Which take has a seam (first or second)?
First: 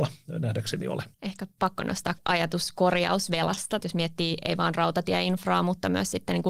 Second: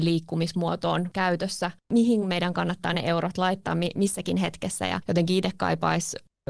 first